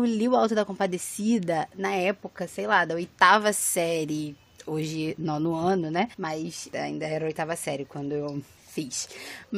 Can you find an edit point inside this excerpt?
yes; 1 cut; at 6.1 s

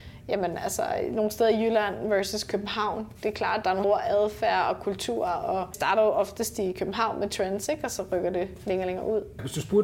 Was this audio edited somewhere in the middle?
yes; 2 cuts; at 3.8 s, 5.7 s

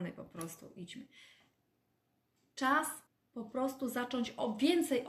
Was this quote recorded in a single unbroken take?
no; 1 cut; at 3.1 s

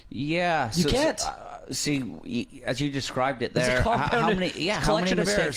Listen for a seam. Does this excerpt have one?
no; 0 cuts

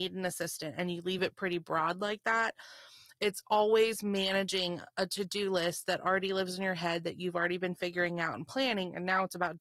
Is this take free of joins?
yes; 0 cuts

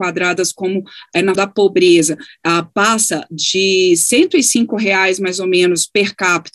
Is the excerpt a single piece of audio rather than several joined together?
no; 1 cut; at 1.3 s

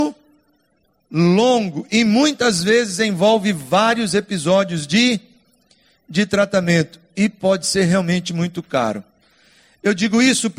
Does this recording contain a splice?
no; 0 cuts

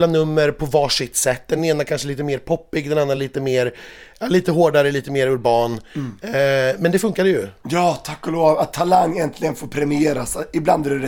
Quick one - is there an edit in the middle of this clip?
no; 0 cuts

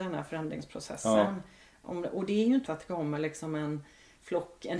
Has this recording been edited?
yes; 1 cut; at 2.6 s

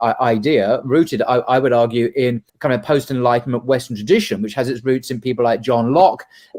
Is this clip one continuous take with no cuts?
no; 1 cut; at 2.5 s

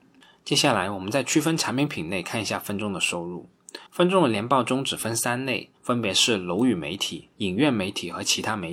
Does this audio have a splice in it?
yes; 3 cuts; at 3.9 s, 5.8 s, 7.3 s

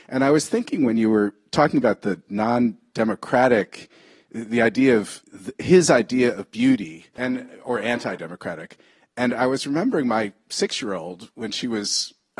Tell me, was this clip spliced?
yes; 2 cuts; at 5.2 s, 7.2 s

